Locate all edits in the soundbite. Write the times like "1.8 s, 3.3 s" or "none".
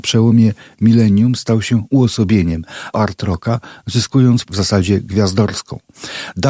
2.9 s, 4.5 s